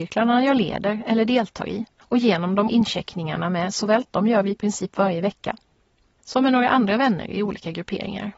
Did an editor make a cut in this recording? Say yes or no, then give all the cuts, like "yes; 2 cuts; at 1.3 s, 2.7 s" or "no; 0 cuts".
yes; 3 cuts; at 1.9 s, 2.7 s, 4.0 s